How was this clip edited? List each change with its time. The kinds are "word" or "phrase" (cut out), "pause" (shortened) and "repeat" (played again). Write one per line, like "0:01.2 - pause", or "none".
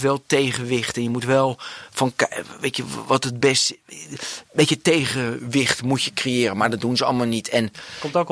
none